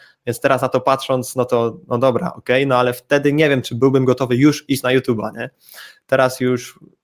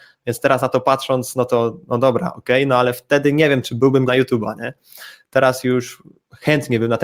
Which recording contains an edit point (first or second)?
second